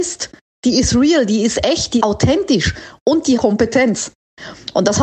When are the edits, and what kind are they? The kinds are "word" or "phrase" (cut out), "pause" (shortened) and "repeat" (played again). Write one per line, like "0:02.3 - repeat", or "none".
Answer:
0:02.0 - word
0:03.4 - phrase